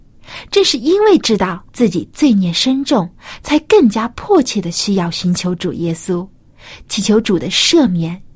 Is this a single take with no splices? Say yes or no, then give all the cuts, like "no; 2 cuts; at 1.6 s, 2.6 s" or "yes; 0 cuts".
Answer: no; 1 cut; at 1.7 s